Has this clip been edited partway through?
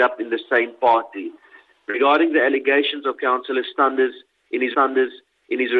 yes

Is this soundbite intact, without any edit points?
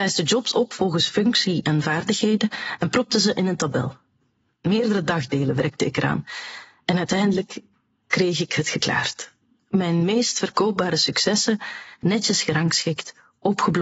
yes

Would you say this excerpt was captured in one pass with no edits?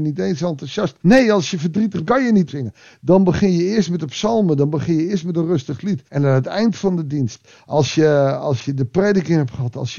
no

